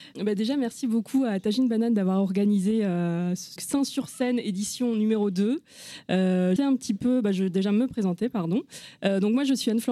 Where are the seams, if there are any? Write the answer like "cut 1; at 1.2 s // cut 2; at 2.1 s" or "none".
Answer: cut 1; at 3.6 s // cut 2; at 6.6 s